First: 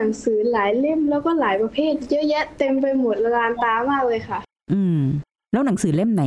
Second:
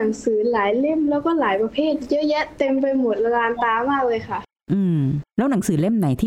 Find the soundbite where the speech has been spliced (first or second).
second